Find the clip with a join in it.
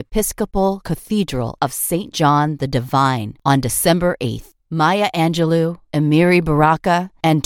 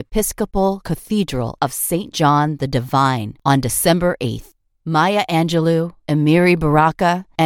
first; 1 cut; at 4.6 s

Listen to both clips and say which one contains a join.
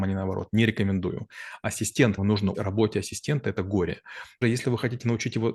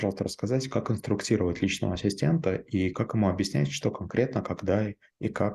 first; 3 cuts; at 2.2 s, 2.5 s, 4.4 s

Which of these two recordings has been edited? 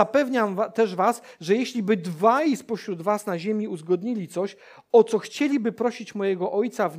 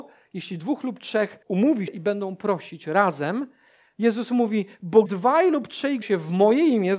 second; 4 cuts; at 1.4 s, 1.9 s, 5.1 s, 6.0 s

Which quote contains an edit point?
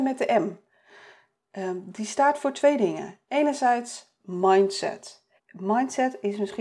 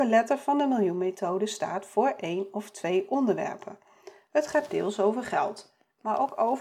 first; 1 cut; at 5.4 s

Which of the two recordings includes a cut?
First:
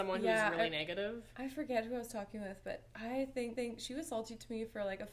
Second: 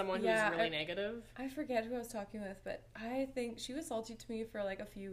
first; 1 cut; at 3.6 s

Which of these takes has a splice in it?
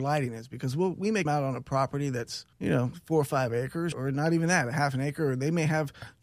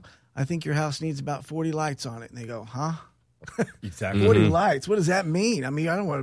first; 3 cuts; at 1.3 s, 2.5 s, 3.9 s

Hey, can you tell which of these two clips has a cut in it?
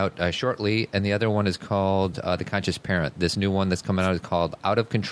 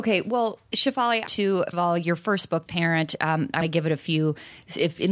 second; 4 cuts; at 1.3 s, 1.7 s, 2.7 s, 3.6 s

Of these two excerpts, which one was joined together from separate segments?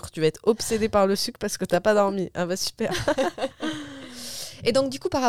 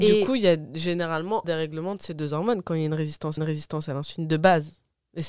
second; 2 cuts; at 1.4 s, 3.4 s

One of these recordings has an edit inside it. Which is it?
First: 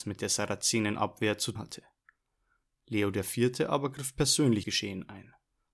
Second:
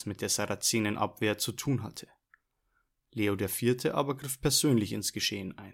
first; 2 cuts; at 1.6 s, 4.6 s

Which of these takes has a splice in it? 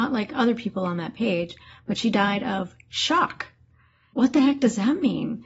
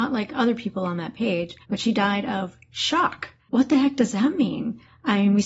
second; 2 cuts; at 1.6 s, 3.4 s

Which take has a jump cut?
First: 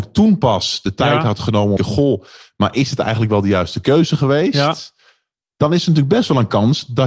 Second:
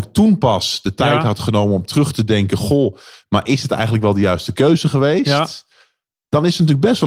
first; 1 cut; at 1.8 s

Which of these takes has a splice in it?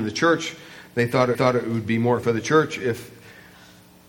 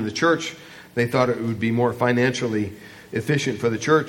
first; 2 cuts; at 1.3 s, 2.2 s

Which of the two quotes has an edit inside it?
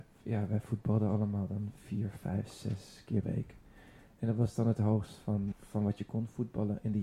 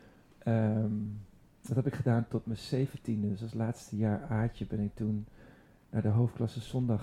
first; 3 cuts; at 1.8 s, 3.2 s, 5.5 s

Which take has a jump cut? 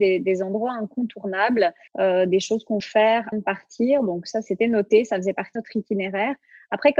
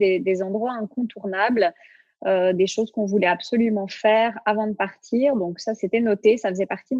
first; 4 cuts; at 1.9 s, 2.8 s, 3.3 s, 5.6 s

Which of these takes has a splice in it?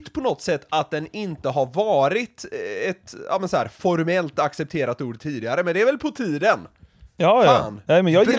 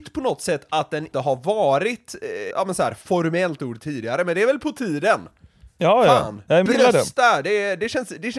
second; 4 cuts; at 1.1 s, 2.5 s, 3.6 s, 6.7 s

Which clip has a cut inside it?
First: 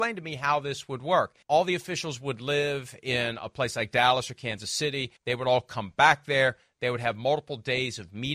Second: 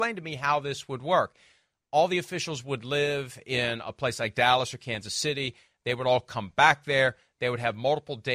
first; 2 cuts; at 1.4 s, 5.2 s

